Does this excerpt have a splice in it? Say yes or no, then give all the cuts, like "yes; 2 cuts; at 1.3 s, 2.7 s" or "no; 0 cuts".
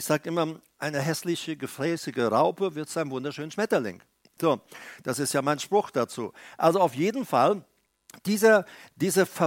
no; 0 cuts